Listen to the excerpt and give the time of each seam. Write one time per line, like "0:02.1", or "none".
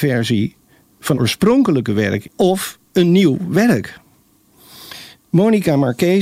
0:01.1
0:02.2